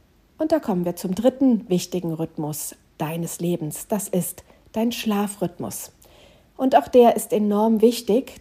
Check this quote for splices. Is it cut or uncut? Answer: uncut